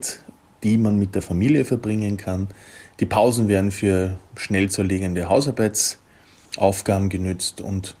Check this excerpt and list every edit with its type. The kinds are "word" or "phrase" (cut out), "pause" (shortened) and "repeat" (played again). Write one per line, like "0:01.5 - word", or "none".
none